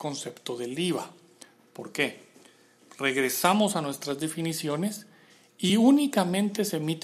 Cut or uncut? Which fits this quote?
uncut